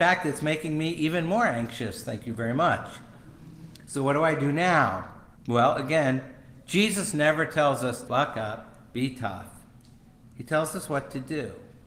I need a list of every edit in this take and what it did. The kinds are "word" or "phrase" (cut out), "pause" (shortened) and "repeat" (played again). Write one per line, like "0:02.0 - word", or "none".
0:05.4 - pause
0:08.1 - word